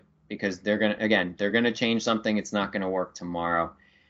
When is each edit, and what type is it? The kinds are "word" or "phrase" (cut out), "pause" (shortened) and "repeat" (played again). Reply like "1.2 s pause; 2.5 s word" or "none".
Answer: none